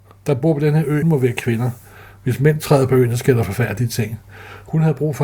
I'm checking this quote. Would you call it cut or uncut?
cut